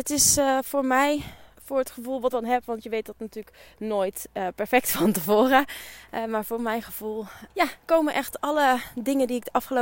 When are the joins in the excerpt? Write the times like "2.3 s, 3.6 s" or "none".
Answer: 1.5 s, 2.3 s